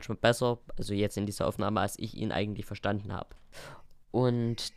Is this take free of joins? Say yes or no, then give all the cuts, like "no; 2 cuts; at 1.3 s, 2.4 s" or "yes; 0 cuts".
yes; 0 cuts